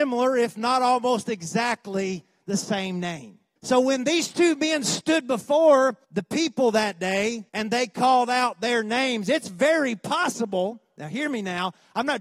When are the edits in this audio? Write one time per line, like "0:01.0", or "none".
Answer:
0:03.6
0:06.0
0:07.5